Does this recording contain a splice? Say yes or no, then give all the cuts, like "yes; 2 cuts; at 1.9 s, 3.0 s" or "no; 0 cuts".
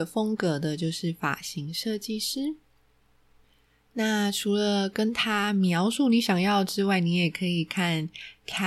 no; 0 cuts